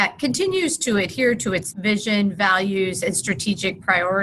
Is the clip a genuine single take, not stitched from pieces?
no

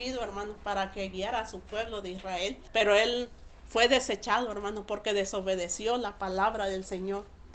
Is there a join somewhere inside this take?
yes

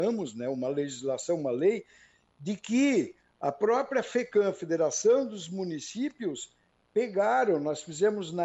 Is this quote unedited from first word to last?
yes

